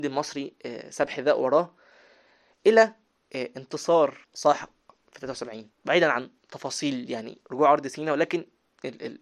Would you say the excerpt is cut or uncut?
cut